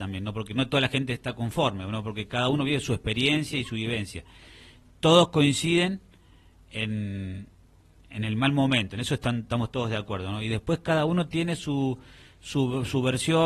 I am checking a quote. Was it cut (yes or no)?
no